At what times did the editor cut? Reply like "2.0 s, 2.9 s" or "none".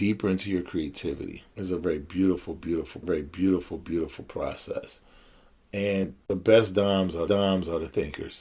1.5 s, 3.0 s, 7.3 s